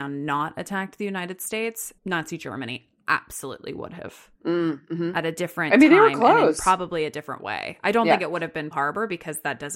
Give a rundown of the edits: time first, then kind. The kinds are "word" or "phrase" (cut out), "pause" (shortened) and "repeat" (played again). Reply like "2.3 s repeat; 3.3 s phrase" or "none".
2.0 s pause; 4.3 s pause; 8.7 s word